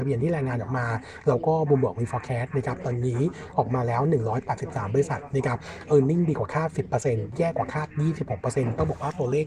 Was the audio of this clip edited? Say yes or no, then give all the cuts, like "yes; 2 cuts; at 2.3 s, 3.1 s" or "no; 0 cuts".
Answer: no; 0 cuts